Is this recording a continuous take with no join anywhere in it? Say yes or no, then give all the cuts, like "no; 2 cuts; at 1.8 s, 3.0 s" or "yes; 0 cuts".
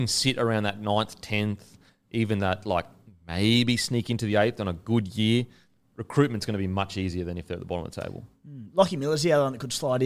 yes; 0 cuts